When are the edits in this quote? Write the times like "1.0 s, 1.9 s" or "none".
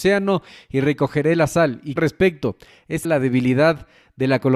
2.0 s, 3.0 s